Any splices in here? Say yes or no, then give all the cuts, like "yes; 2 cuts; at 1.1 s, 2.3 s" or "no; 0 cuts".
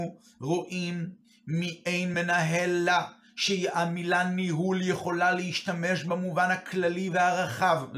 no; 0 cuts